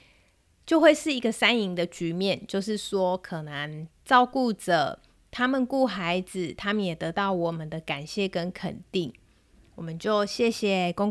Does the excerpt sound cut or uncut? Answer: uncut